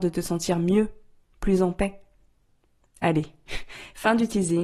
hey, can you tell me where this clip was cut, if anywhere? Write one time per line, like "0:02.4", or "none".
none